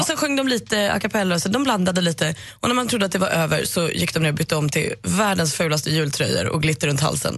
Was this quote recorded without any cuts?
yes; 0 cuts

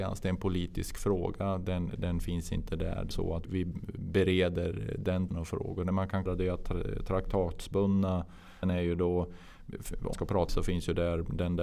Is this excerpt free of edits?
no; 8 cuts; at 2.0 s, 3.1 s, 3.4 s, 5.3 s, 6.3 s, 8.6 s, 10.1 s, 10.5 s

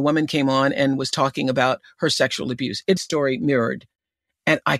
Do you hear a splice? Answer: yes; 1 cut; at 3.0 s

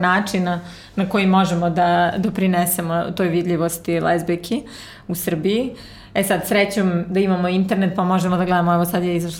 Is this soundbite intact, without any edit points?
yes; 0 cuts

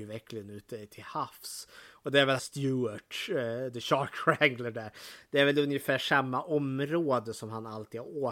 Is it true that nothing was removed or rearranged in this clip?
no; 1 cut; at 2.4 s

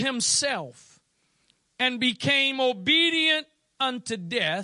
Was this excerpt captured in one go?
yes; 0 cuts

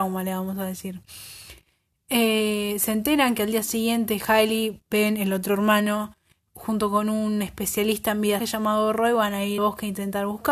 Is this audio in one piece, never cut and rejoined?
no; 2 cuts; at 8.4 s, 9.6 s

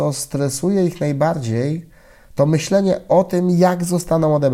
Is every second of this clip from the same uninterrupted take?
yes; 0 cuts

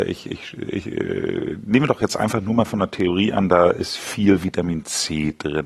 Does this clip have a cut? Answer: no; 0 cuts

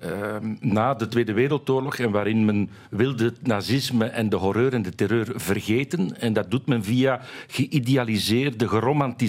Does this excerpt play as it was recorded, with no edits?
yes; 0 cuts

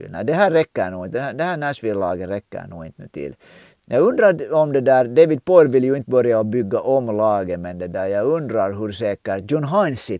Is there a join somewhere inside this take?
no; 0 cuts

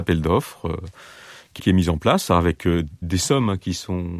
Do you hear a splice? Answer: yes; 2 cuts; at 1.6 s, 3.0 s

